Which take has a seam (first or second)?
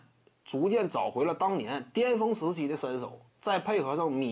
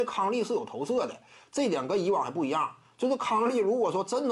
first